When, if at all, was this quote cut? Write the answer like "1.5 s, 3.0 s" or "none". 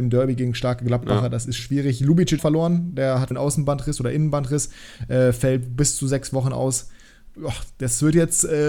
1.6 s, 2.4 s, 3.3 s